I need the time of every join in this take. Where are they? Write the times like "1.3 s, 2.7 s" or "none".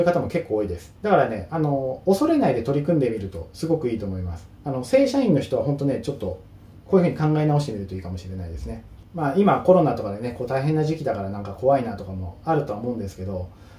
1.0 s